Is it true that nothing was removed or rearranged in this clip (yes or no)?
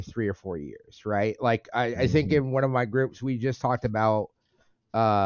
yes